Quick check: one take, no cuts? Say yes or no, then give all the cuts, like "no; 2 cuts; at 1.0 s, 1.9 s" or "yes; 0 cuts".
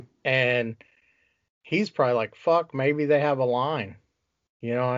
yes; 0 cuts